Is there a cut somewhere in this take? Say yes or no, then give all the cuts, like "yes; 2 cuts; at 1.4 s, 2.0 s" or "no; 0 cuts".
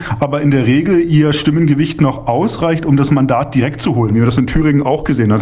no; 0 cuts